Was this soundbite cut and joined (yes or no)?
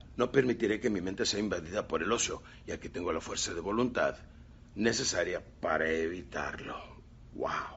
no